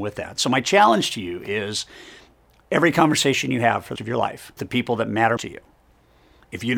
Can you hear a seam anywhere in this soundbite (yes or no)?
yes